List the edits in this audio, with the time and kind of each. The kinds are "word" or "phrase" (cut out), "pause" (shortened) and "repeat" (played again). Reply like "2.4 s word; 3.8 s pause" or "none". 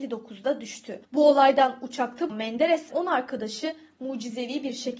1.0 s pause; 2.3 s word; 2.9 s word